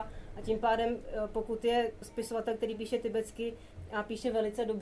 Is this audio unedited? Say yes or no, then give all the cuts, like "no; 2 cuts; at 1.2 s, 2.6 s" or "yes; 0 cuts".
yes; 0 cuts